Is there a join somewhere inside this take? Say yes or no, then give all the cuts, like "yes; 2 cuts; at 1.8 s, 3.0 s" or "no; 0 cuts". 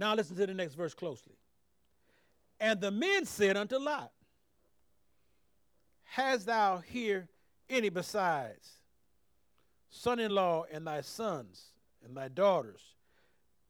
no; 0 cuts